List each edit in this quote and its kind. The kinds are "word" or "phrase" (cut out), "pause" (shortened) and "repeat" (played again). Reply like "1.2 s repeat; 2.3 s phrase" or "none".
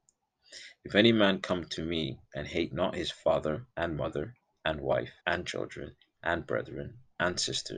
3.7 s pause; 5.2 s pause